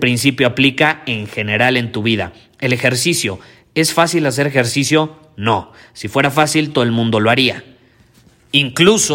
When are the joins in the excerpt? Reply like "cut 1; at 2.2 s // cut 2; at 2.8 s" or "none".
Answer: none